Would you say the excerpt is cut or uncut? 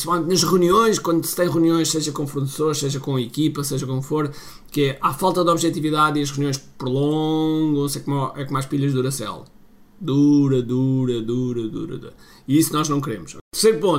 uncut